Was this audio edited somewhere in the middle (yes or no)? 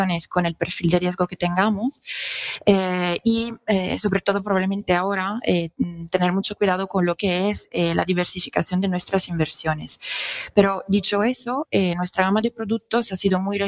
no